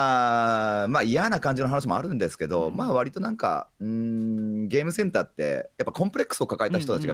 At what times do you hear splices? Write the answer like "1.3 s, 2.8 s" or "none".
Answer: 5.7 s